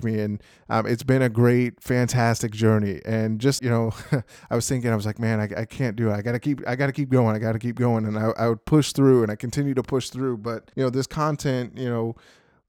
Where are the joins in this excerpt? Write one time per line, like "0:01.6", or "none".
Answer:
0:03.6
0:10.7